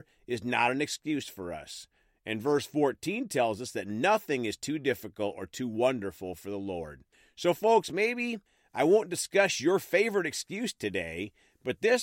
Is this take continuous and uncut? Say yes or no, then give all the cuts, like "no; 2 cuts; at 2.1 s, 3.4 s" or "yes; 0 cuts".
yes; 0 cuts